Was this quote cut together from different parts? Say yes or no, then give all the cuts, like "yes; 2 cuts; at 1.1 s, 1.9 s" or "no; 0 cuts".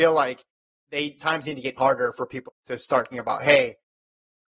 yes; 4 cuts; at 1.2 s, 1.8 s, 2.5 s, 3.1 s